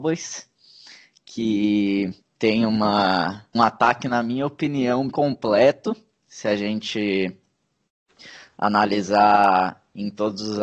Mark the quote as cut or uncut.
cut